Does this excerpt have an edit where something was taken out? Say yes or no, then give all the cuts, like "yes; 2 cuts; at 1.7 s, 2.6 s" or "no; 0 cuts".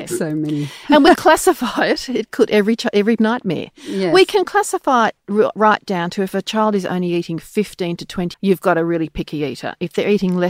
yes; 3 cuts; at 1.2 s, 3.2 s, 8.3 s